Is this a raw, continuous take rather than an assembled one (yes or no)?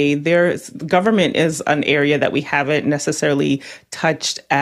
yes